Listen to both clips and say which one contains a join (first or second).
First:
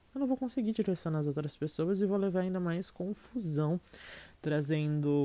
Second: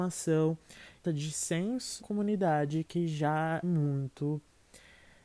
second